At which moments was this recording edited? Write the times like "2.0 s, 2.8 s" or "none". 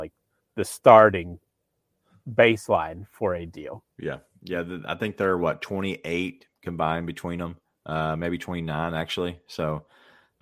3.9 s